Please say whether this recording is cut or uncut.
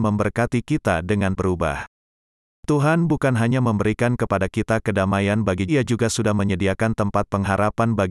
cut